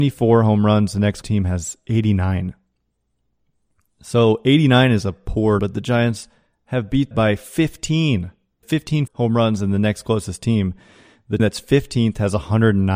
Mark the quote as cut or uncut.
cut